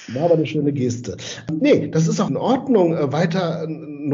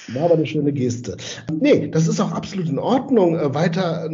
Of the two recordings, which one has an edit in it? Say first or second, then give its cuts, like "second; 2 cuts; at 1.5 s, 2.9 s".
first; 1 cut; at 2.3 s